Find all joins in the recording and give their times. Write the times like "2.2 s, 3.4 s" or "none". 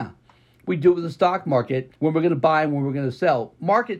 1.9 s